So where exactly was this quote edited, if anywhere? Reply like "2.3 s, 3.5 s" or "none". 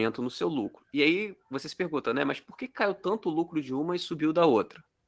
none